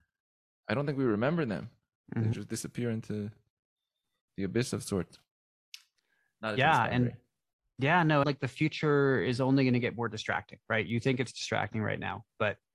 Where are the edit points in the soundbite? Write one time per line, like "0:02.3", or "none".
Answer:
0:08.2